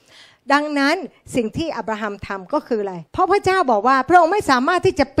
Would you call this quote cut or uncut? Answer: cut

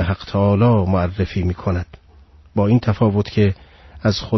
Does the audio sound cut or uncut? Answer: uncut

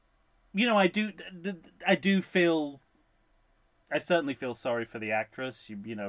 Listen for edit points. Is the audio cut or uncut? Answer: uncut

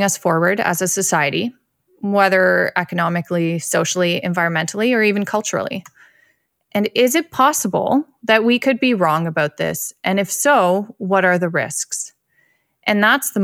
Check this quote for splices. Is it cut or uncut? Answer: uncut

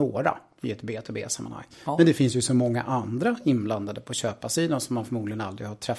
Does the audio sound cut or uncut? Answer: uncut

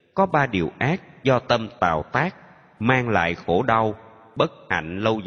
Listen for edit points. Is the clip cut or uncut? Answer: uncut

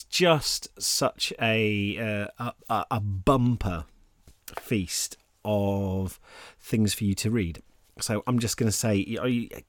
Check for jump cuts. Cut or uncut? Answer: cut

